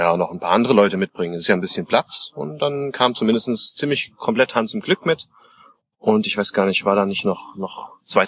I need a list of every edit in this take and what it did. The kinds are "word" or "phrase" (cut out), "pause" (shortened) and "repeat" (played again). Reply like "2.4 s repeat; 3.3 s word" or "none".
none